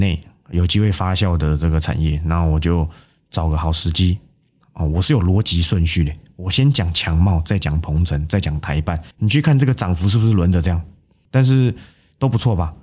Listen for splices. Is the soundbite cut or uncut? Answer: cut